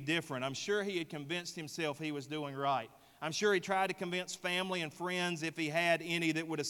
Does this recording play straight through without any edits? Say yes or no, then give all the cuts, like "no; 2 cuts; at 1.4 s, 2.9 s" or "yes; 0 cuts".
yes; 0 cuts